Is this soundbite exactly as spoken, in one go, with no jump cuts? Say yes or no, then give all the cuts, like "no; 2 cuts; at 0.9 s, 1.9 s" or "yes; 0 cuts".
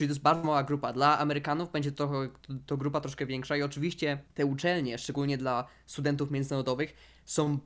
no; 1 cut; at 4.3 s